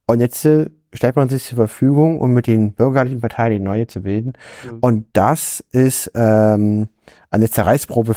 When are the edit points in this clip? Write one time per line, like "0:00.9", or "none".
0:05.1